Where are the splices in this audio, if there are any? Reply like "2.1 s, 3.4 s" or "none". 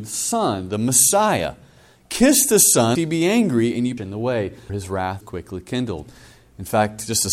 3.0 s, 4.0 s, 4.7 s, 5.2 s